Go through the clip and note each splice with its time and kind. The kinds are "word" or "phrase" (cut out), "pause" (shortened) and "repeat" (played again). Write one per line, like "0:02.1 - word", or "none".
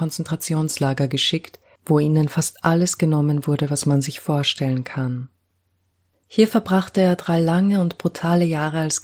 none